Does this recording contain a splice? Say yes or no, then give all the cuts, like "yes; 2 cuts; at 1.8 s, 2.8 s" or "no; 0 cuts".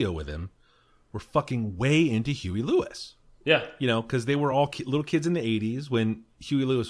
no; 0 cuts